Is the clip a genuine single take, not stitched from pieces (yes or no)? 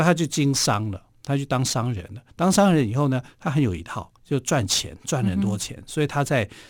no